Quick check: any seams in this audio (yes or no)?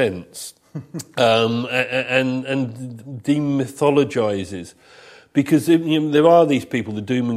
no